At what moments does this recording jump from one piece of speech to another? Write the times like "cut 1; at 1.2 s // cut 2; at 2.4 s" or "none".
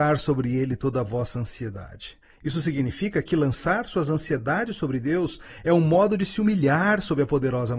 cut 1; at 2.2 s